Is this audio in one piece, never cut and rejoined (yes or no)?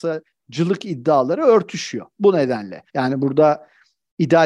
no